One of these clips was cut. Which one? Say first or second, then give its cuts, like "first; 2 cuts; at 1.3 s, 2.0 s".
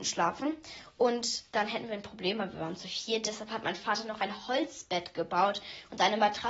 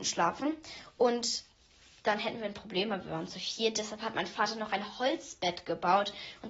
first; 1 cut; at 1.5 s